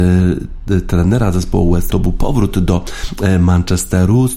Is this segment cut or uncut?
cut